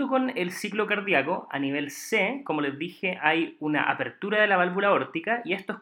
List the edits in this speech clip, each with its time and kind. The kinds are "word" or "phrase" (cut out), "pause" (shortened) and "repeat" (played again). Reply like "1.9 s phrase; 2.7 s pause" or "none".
none